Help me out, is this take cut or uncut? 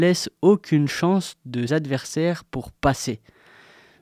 cut